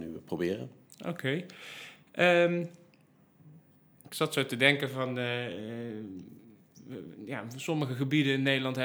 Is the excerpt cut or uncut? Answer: uncut